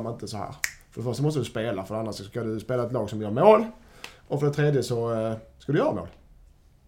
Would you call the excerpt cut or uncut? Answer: uncut